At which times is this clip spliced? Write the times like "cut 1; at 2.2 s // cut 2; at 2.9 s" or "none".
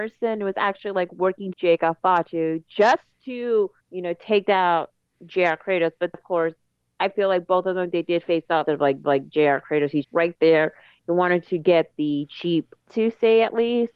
cut 1; at 1.5 s // cut 2; at 3.8 s // cut 3; at 6.1 s // cut 4; at 8.7 s // cut 5; at 9.0 s // cut 6; at 10.0 s // cut 7; at 12.9 s